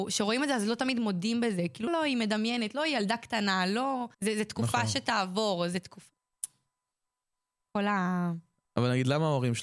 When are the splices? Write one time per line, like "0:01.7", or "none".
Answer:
0:01.9
0:04.1